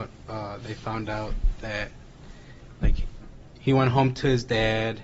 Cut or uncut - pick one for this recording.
uncut